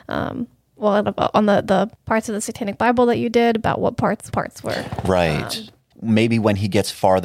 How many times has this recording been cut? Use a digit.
3